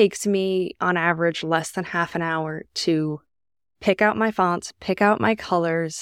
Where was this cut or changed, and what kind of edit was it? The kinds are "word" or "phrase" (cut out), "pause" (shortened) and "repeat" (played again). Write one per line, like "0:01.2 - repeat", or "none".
none